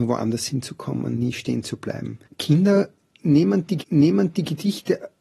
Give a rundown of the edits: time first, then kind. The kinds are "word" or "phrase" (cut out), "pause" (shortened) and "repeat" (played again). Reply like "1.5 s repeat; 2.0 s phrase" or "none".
1.1 s word; 3.8 s repeat